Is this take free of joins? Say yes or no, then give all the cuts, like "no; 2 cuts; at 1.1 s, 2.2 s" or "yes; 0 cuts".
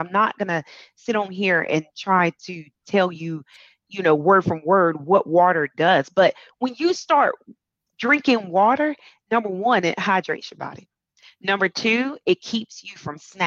yes; 0 cuts